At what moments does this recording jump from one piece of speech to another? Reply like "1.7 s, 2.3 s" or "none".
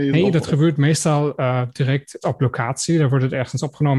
2.2 s